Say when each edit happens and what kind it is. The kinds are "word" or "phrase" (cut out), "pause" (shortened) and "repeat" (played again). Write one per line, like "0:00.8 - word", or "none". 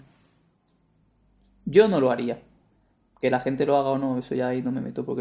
none